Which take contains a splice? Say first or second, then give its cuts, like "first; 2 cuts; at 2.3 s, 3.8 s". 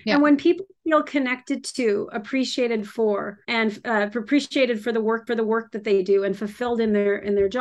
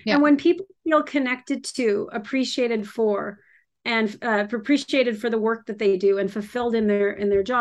first; 2 cuts; at 3.4 s, 5.3 s